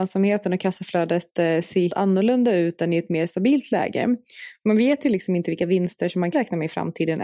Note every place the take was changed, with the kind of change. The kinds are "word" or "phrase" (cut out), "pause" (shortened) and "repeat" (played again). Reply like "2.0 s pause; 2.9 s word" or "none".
1.9 s word; 6.3 s word